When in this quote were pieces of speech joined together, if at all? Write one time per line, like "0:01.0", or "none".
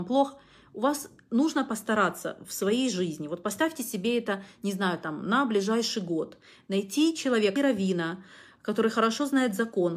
0:07.6